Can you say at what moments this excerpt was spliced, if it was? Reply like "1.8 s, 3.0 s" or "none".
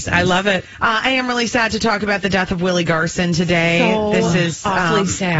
none